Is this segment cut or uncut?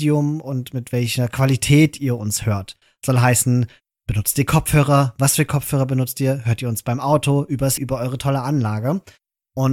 cut